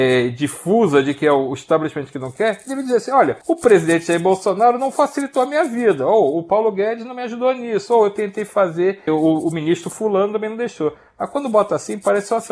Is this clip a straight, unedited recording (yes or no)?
no